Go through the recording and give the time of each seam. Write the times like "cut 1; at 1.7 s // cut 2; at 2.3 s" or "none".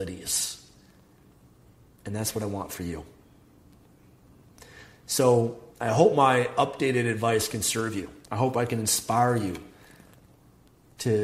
cut 1; at 8.2 s